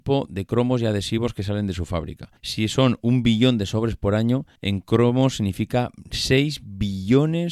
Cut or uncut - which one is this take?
cut